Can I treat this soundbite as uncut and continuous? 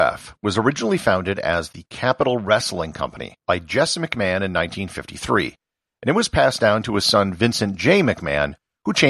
no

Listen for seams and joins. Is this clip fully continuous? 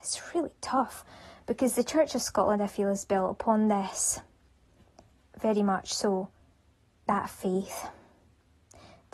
yes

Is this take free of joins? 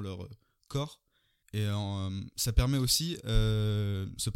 yes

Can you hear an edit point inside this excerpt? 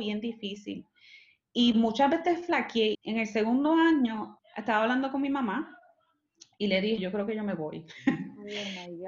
yes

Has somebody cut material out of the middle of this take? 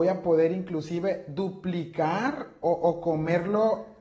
no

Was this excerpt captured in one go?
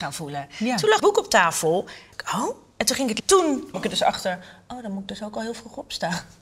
no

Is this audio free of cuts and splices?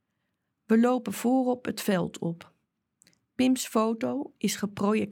yes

